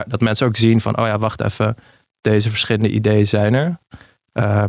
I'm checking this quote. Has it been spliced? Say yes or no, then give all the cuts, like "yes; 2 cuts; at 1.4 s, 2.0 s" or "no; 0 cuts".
no; 0 cuts